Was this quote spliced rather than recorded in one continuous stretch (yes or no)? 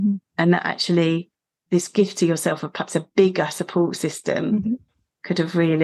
no